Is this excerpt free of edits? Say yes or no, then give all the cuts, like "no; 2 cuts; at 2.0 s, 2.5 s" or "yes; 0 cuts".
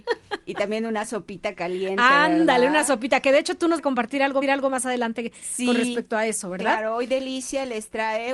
no; 2 cuts; at 3.8 s, 4.4 s